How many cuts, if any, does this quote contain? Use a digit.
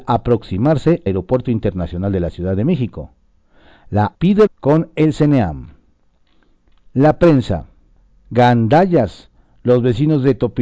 3